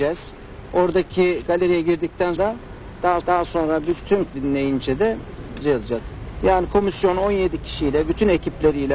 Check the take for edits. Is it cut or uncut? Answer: cut